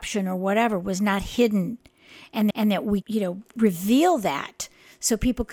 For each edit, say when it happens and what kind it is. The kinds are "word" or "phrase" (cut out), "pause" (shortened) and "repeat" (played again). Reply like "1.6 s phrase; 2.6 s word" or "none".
2.5 s repeat; 3.0 s word